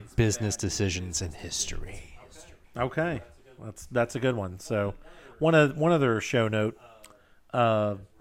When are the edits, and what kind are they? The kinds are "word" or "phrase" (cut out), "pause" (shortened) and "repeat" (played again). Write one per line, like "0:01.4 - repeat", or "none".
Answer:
0:02.6 - pause